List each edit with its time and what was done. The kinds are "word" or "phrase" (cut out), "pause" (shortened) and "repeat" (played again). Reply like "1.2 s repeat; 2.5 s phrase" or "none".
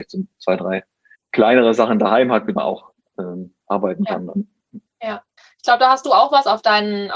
1.2 s pause; 2.6 s word; 3.6 s pause; 5.4 s pause